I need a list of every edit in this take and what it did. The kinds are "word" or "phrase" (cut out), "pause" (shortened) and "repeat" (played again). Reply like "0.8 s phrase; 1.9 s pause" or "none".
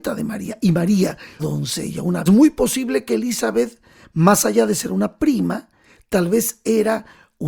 1.4 s word; 2.3 s phrase

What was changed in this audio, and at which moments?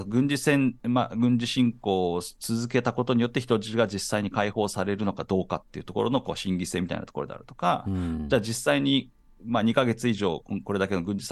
none

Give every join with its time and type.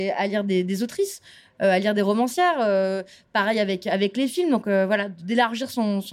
none

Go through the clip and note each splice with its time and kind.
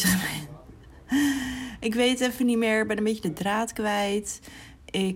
none

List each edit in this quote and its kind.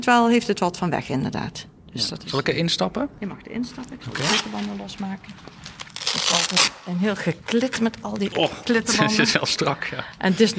none

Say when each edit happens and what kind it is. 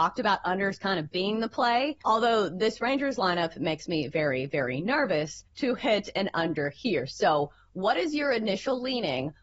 2.0 s pause; 5.4 s pause

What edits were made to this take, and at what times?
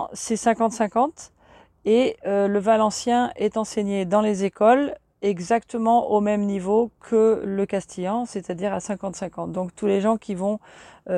none

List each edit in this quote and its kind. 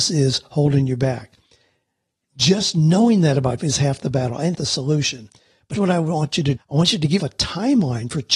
3.6 s word; 4.5 s word; 5.8 s word; 6.6 s word; 7.2 s word

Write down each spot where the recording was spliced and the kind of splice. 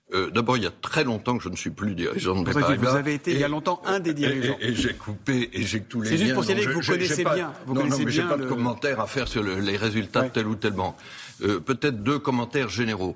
2.4 s word; 5.8 s word; 12.0 s word

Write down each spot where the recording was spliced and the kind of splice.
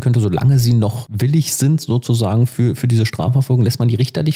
none

